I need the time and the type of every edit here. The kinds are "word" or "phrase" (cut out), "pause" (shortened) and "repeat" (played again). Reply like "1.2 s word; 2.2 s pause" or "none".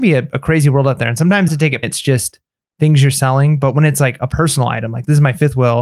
1.5 s phrase; 1.8 s phrase